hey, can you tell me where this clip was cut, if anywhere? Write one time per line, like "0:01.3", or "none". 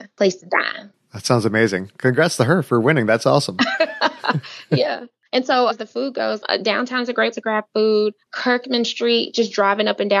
0:05.3
0:05.7
0:06.4
0:07.3
0:08.2